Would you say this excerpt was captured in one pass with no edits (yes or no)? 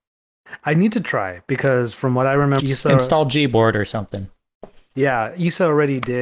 no